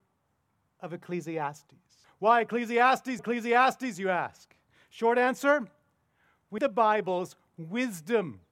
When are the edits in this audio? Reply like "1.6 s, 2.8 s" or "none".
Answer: 2.0 s, 3.2 s, 6.6 s